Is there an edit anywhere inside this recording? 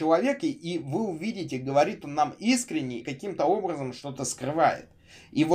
yes; 1 cut; at 3.0 s

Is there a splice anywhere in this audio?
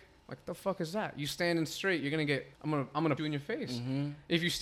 yes; 2 cuts; at 2.5 s, 3.2 s

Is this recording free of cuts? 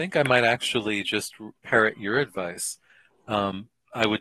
yes; 0 cuts

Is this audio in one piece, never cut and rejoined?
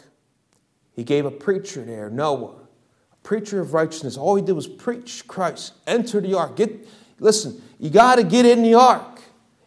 yes; 0 cuts

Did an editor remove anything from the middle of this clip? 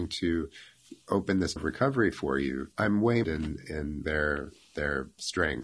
yes; 4 cuts; at 1.6 s, 2.7 s, 3.2 s, 4.0 s

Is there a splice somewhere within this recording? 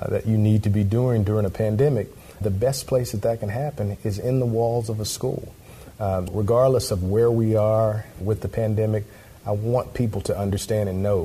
yes; 3 cuts; at 2.4 s, 6.3 s, 8.2 s

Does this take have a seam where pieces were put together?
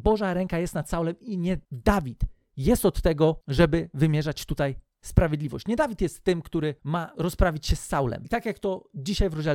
no; 0 cuts

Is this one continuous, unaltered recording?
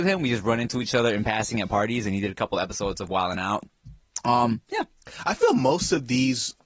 yes; 0 cuts

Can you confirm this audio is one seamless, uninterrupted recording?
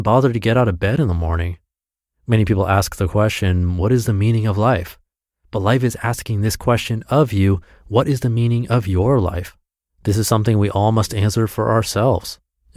yes; 0 cuts

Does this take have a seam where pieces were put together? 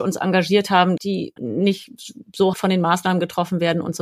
yes; 3 cuts; at 1.0 s, 1.4 s, 2.5 s

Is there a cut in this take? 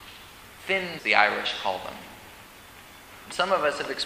yes; 1 cut; at 1.0 s

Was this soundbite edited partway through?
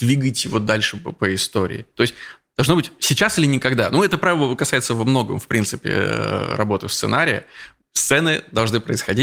no; 0 cuts

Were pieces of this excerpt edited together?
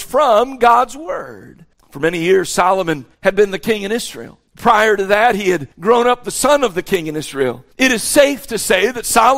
yes; 5 cuts; at 1.7 s, 3.1 s, 4.5 s, 5.7 s, 7.7 s

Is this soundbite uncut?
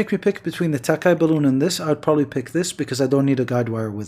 yes; 0 cuts

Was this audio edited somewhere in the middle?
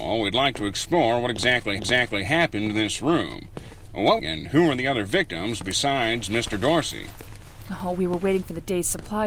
yes; 2 cuts; at 1.8 s, 4.2 s

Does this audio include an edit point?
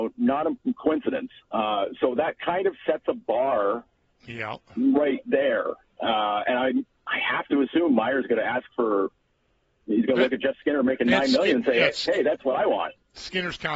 yes; 1 cut; at 1.4 s

